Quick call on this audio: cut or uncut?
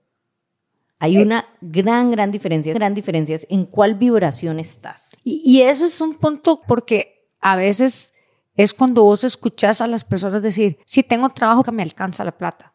cut